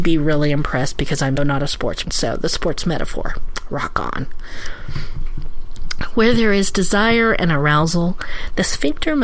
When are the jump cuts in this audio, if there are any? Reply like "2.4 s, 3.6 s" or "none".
1.4 s, 2.0 s